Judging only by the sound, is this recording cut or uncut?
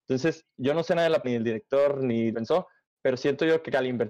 cut